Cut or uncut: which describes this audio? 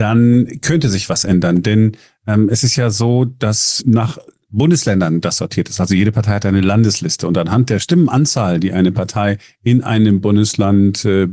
uncut